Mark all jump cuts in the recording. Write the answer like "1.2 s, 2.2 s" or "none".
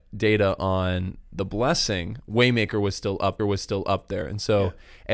3.4 s